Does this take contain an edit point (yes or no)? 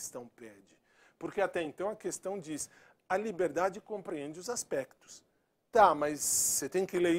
no